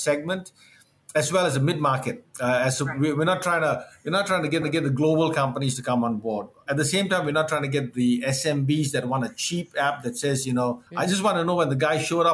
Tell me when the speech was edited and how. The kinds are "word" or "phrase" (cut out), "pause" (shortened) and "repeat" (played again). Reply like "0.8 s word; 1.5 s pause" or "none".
2.3 s pause; 4.6 s repeat; 10.9 s pause